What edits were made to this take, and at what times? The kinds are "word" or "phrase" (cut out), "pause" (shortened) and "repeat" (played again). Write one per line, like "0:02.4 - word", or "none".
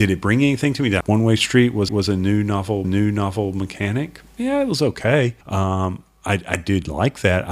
0:01.0 - phrase
0:01.9 - repeat
0:02.8 - repeat
0:05.4 - pause